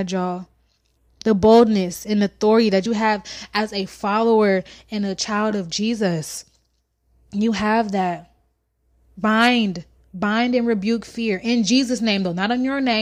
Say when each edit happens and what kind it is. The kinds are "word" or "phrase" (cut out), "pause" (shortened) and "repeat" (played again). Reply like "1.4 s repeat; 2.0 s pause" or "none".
none